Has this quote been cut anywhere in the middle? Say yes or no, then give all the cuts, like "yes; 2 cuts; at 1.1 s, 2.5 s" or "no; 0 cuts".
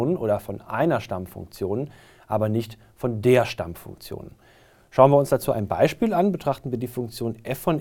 no; 0 cuts